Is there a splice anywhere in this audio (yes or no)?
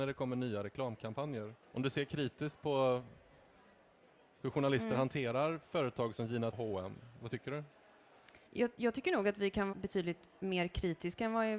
yes